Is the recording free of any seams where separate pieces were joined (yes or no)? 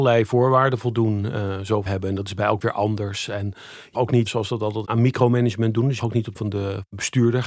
no